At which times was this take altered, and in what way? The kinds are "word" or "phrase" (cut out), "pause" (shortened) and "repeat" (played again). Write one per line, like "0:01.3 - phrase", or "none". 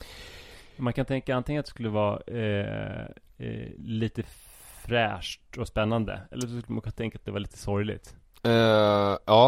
none